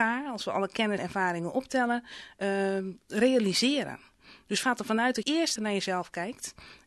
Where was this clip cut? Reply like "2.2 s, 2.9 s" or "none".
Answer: 1.0 s, 4.6 s, 5.2 s, 5.6 s